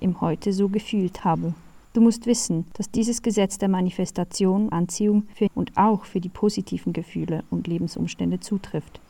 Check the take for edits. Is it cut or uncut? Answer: cut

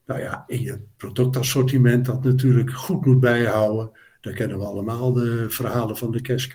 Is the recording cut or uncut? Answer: uncut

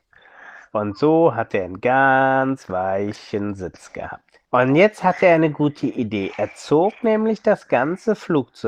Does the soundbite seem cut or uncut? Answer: cut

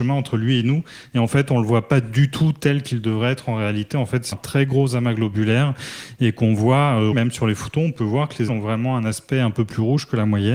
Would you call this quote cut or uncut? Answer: cut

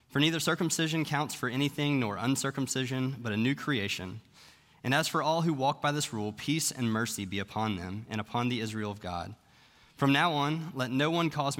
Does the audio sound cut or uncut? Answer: uncut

